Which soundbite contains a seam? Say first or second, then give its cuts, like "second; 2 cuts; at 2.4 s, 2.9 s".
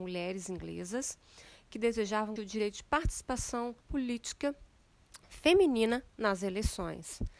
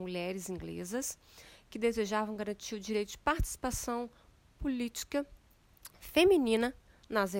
first; 3 cuts; at 2.4 s, 3.8 s, 6.1 s